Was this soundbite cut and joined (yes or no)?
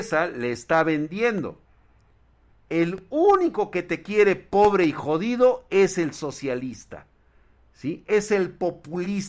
no